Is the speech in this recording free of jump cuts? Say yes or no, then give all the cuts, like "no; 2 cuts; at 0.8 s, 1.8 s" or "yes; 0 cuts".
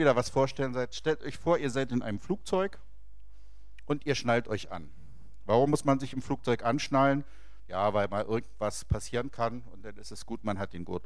yes; 0 cuts